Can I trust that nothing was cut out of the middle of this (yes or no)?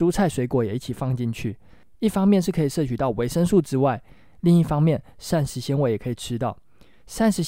yes